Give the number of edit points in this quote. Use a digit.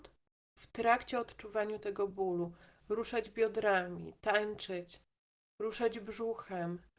0